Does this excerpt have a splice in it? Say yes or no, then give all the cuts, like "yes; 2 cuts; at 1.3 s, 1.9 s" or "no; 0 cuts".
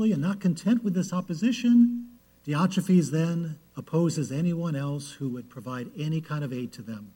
yes; 2 cuts; at 2.2 s, 3.7 s